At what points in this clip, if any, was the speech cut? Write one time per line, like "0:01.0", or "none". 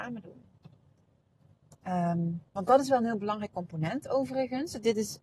0:02.5